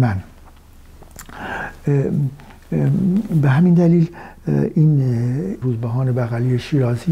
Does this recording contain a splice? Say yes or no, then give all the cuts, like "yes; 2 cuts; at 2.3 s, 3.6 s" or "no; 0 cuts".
yes; 1 cut; at 5.6 s